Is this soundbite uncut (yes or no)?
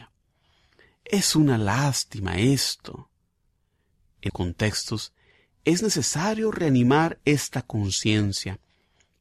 no